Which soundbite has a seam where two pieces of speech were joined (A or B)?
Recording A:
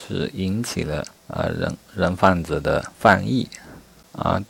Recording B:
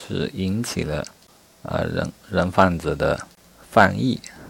A